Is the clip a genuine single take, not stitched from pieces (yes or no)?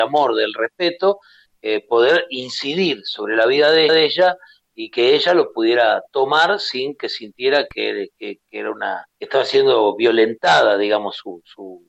no